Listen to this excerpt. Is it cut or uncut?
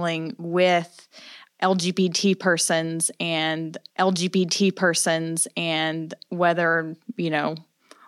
cut